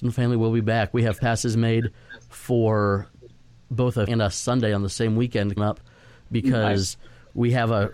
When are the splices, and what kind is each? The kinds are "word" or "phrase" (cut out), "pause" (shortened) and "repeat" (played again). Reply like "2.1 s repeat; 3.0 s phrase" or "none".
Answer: 1.2 s word; 4.1 s word; 5.6 s word